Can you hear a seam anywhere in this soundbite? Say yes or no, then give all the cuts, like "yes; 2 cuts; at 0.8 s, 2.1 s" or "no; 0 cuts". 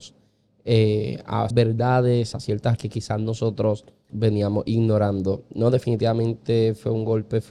yes; 4 cuts; at 1.5 s, 2.3 s, 2.8 s, 4.1 s